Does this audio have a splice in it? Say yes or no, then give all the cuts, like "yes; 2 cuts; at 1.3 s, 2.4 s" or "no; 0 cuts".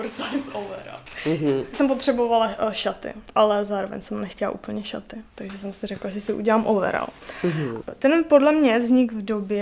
no; 0 cuts